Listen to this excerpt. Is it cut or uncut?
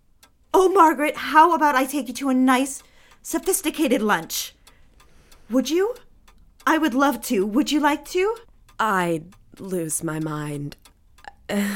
uncut